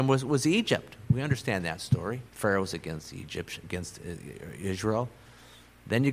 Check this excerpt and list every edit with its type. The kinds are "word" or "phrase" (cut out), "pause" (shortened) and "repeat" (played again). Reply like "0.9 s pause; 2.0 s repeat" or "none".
2.3 s pause; 3.6 s phrase